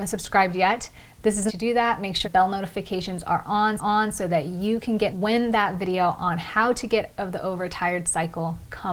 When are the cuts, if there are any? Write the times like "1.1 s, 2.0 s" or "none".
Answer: 1.5 s, 2.2 s, 3.8 s, 5.1 s, 7.1 s